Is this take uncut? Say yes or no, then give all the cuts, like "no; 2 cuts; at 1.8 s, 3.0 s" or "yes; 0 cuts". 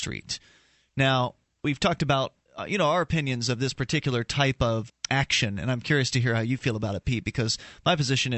no; 2 cuts; at 2.4 s, 4.9 s